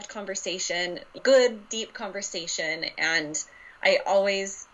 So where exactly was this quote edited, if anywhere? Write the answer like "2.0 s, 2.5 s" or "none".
1.2 s